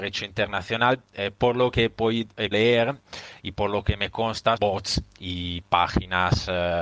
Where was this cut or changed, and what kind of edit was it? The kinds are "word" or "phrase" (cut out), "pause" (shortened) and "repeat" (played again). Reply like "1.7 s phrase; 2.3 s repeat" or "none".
2.5 s word; 4.6 s phrase